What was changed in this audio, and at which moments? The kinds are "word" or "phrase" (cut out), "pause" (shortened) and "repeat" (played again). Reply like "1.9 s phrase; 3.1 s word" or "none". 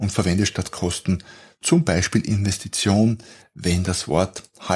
none